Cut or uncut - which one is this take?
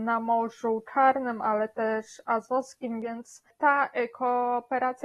uncut